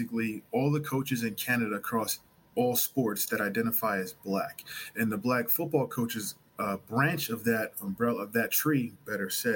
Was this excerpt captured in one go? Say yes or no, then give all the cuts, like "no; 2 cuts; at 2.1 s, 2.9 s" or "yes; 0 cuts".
yes; 0 cuts